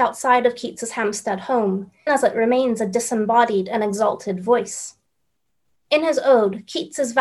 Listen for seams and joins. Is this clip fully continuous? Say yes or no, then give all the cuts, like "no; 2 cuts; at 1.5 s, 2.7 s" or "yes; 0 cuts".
no; 1 cut; at 2.1 s